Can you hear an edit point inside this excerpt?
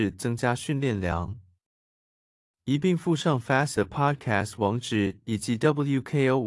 yes; 1 cut; at 3.7 s

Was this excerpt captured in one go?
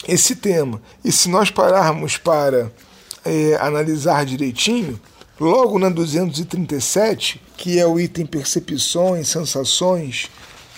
no; 3 cuts; at 0.9 s, 5.2 s, 7.5 s

